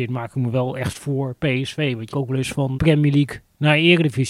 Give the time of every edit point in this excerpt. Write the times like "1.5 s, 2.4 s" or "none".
0.9 s, 2.1 s, 2.7 s